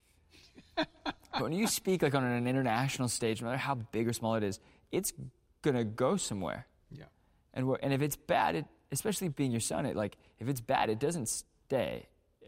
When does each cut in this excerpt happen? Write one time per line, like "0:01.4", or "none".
none